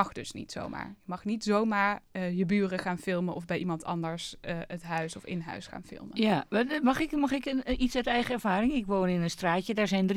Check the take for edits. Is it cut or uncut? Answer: uncut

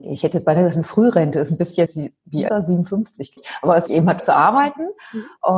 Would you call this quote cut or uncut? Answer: cut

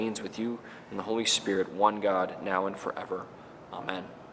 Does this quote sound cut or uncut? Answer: uncut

